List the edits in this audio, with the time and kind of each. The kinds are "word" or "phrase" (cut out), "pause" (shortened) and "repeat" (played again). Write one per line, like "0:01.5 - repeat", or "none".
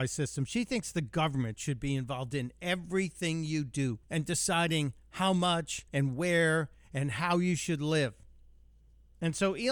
0:04.0 - pause
0:05.9 - pause